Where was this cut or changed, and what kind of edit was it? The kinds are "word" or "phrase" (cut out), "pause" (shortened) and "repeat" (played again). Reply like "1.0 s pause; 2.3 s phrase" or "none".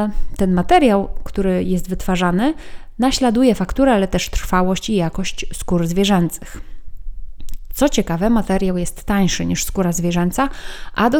none